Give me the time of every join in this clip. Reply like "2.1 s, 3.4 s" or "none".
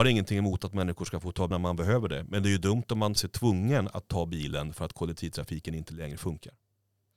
1.5 s, 3.2 s